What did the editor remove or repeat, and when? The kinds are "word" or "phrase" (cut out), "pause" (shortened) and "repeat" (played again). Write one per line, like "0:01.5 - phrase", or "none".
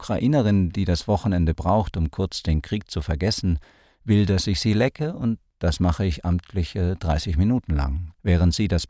none